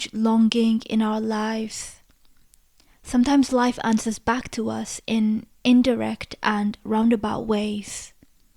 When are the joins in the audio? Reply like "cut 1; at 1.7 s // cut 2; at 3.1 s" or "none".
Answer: none